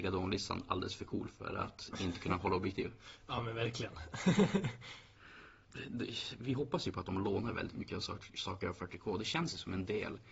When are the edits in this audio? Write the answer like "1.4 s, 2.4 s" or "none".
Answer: 5.6 s